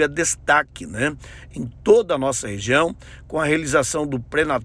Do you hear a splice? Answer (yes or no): no